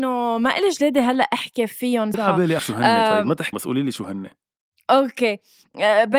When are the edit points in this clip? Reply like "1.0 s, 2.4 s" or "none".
2.1 s, 2.6 s, 3.5 s, 4.7 s